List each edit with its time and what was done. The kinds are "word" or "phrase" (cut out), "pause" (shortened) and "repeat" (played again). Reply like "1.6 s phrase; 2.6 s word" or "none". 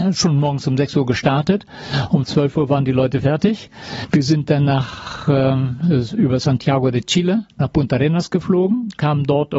none